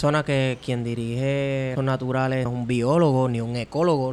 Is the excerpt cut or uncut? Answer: cut